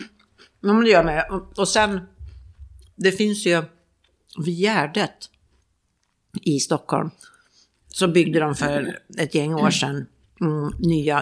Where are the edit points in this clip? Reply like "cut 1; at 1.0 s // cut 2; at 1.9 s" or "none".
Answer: none